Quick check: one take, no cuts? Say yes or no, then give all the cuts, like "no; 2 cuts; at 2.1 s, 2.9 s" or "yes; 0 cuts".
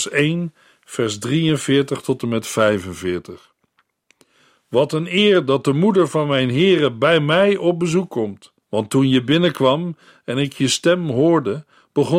no; 1 cut; at 8.6 s